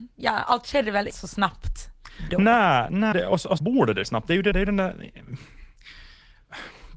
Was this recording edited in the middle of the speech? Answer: yes; 5 cuts; at 1.1 s, 3.1 s, 3.6 s, 4.0 s, 4.5 s

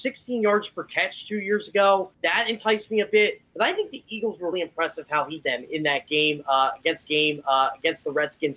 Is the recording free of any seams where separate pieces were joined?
no; 4 cuts; at 2.1 s, 4.5 s, 5.4 s, 7.0 s

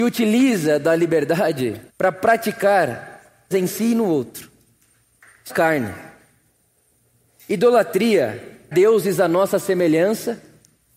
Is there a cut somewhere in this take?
yes; 4 cuts; at 1.9 s, 3.5 s, 5.5 s, 8.7 s

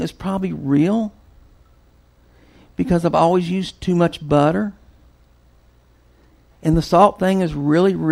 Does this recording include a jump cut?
no; 0 cuts

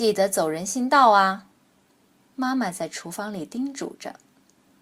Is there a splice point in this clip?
yes; 1 cut; at 1.6 s

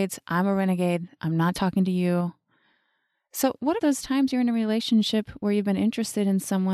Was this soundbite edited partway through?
yes; 2 cuts; at 1.5 s, 3.8 s

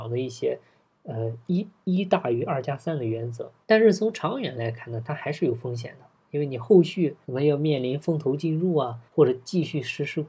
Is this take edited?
yes; 3 cuts; at 3.6 s, 7.2 s, 9.1 s

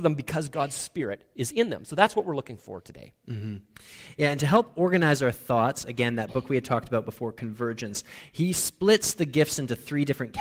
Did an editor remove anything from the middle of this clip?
no; 0 cuts

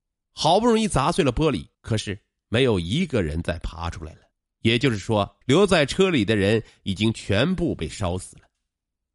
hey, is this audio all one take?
no; 3 cuts; at 1.7 s, 4.3 s, 5.4 s

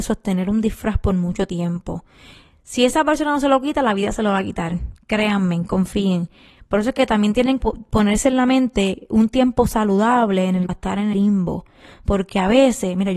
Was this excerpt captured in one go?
no; 3 cuts; at 7.6 s, 10.7 s, 11.1 s

